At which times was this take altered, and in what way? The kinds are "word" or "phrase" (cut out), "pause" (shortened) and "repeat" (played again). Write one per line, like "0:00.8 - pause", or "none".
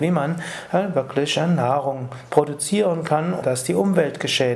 0:03.4 - word